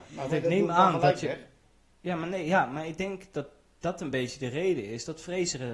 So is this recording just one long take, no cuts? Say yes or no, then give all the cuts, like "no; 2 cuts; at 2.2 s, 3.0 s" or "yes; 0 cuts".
yes; 0 cuts